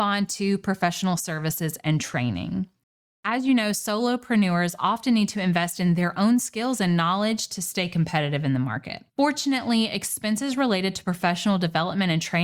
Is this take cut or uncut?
cut